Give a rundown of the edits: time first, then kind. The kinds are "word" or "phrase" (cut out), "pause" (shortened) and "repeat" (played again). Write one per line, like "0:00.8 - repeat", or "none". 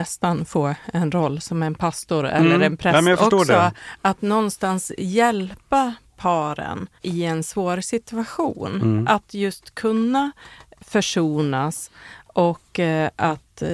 0:07.0 - pause